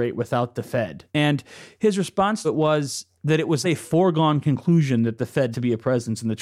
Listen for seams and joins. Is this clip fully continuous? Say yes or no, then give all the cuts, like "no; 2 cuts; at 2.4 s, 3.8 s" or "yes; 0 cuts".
no; 5 cuts; at 1.1 s, 2.4 s, 3.1 s, 3.6 s, 5.5 s